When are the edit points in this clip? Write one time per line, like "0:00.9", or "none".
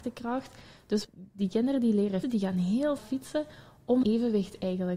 0:01.0
0:02.2
0:03.0
0:04.0